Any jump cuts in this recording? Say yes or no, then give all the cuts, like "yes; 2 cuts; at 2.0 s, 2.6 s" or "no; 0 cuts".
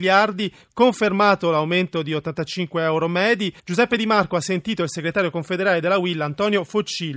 yes; 1 cut; at 3.6 s